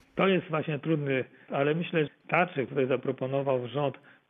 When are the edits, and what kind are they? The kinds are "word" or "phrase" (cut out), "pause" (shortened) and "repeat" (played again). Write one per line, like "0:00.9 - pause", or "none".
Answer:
0:01.5 - word
0:02.1 - word
0:02.7 - word